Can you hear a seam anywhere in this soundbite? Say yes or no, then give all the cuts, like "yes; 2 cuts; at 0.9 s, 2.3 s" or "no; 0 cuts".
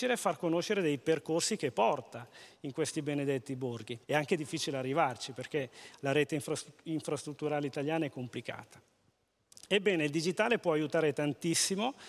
yes; 1 cut; at 4.0 s